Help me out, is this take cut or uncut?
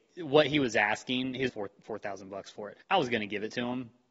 cut